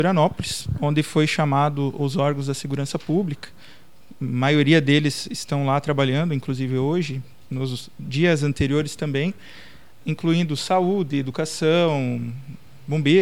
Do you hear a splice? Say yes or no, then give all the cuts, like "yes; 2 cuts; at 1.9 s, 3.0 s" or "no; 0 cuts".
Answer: yes; 1 cut; at 10.0 s